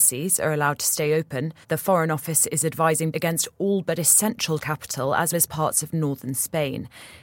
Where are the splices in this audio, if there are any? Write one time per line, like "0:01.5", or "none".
0:01.6
0:03.1
0:04.6
0:05.3